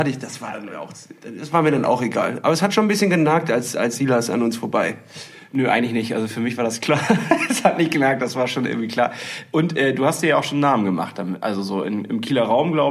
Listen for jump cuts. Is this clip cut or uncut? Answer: uncut